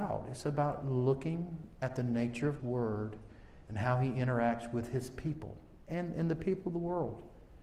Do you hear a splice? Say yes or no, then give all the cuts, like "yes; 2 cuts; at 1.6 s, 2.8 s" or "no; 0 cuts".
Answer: yes; 2 cuts; at 2.6 s, 3.6 s